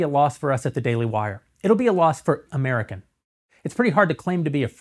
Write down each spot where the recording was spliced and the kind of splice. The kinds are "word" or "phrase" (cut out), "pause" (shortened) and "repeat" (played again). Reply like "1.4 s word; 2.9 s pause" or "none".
2.5 s word